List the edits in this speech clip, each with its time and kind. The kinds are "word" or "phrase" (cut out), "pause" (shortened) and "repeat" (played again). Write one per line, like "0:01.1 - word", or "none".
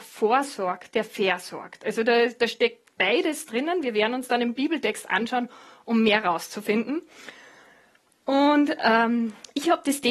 none